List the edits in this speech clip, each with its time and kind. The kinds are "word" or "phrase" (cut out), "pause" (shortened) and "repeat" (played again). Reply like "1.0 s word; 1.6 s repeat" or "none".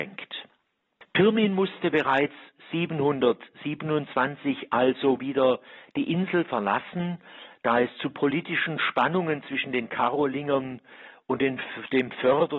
none